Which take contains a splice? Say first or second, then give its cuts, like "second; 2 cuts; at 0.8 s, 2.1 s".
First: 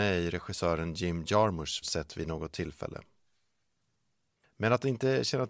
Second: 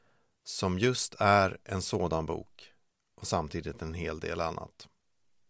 first; 1 cut; at 1.8 s